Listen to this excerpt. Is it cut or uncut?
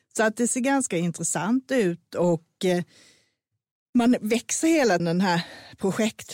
cut